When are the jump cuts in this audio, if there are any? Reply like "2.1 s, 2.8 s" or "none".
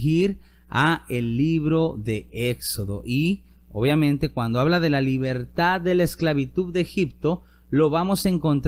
none

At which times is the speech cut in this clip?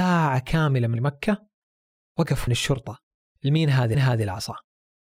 1.0 s, 2.5 s, 3.3 s, 3.9 s

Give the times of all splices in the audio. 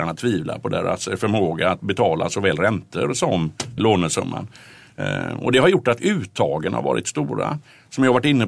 3.8 s

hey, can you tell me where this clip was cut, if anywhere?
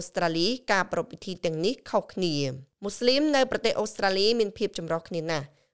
2.7 s

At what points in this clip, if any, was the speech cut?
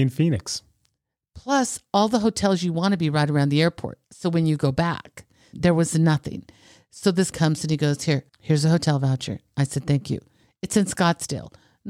4.0 s, 5.5 s, 7.3 s, 8.3 s

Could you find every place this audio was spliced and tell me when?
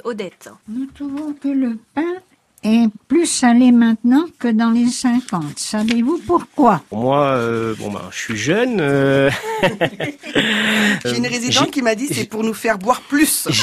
4.9 s, 6.9 s, 11.0 s

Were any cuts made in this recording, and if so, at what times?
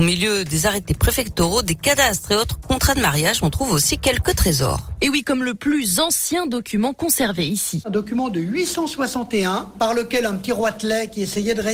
none

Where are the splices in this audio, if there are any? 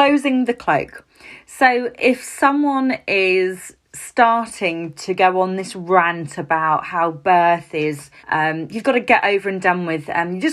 3.8 s, 8.2 s, 8.8 s

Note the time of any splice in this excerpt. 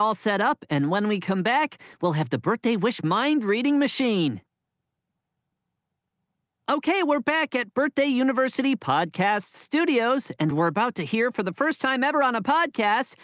none

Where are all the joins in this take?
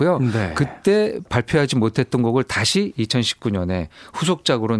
none

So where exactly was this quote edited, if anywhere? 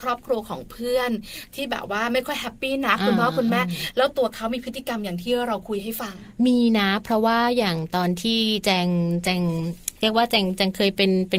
6.4 s, 10.0 s

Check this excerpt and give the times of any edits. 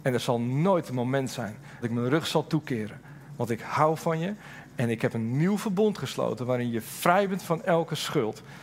1.8 s

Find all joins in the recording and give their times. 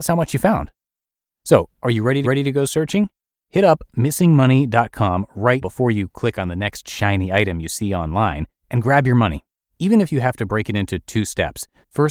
2.2 s, 5.6 s, 8.6 s

